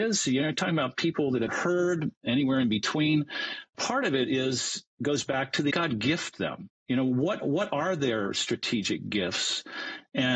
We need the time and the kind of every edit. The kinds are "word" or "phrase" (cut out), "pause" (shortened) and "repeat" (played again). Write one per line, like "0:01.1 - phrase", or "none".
0:01.5 - word
0:03.7 - word
0:04.9 - pause
0:05.7 - phrase
0:06.8 - pause